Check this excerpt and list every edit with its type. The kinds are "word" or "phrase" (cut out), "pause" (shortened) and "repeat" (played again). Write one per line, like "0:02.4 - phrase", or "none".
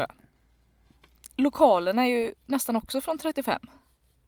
0:01.3 - pause